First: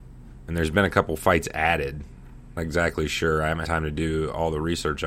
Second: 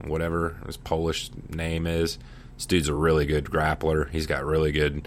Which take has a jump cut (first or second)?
first